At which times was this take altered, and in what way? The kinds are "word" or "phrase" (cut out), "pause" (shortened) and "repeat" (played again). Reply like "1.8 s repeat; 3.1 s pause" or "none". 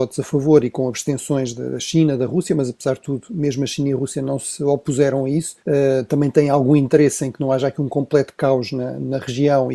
5.6 s pause